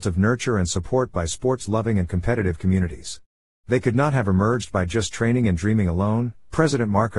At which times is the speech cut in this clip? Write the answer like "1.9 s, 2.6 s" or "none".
none